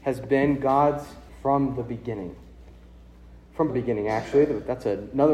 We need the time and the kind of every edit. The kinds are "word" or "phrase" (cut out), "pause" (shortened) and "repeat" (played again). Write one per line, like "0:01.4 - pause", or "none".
0:01.3 - word
0:03.7 - word